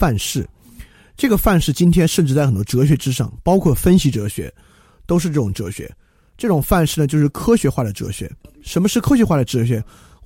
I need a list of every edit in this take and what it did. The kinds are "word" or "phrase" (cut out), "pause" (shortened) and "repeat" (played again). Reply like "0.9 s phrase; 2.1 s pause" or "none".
none